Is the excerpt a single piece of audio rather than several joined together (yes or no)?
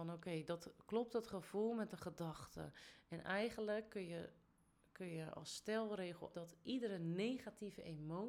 no